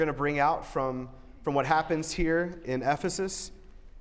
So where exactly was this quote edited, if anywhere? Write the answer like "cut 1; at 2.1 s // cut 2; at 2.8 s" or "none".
none